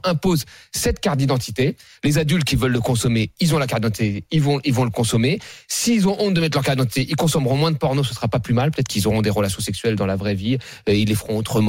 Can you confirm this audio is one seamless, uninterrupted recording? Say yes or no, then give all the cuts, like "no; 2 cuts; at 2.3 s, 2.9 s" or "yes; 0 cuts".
yes; 0 cuts